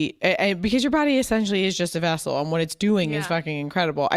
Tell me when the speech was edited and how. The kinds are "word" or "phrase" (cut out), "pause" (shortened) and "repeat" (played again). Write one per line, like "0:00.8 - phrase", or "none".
none